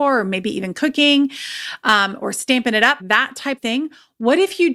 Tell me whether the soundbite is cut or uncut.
cut